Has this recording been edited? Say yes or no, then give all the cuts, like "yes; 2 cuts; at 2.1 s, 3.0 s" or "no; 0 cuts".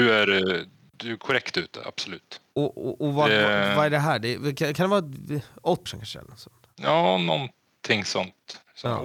yes; 1 cut; at 5.9 s